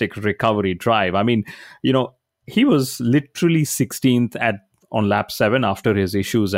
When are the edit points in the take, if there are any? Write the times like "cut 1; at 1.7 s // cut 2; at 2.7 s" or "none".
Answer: none